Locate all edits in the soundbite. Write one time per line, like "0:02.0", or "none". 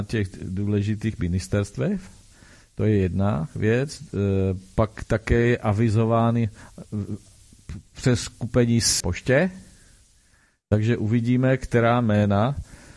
0:09.0